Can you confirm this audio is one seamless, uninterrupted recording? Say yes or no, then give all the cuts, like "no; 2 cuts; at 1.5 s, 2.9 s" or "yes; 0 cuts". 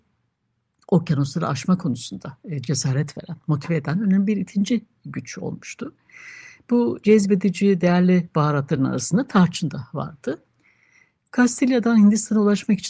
yes; 0 cuts